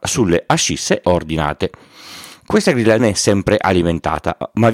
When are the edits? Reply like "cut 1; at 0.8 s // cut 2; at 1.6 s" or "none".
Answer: cut 1; at 1.0 s // cut 2; at 3.0 s